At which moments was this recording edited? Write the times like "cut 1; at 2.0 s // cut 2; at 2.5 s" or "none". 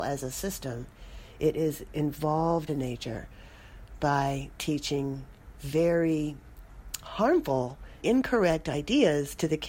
cut 1; at 2.7 s // cut 2; at 8.0 s